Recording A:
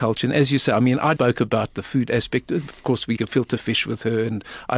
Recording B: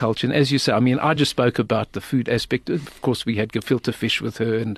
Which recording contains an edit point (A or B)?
A